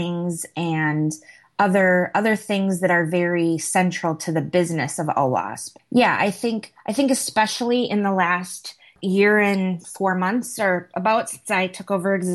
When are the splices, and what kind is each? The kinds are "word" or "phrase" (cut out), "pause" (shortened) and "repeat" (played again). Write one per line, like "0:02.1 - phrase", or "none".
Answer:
none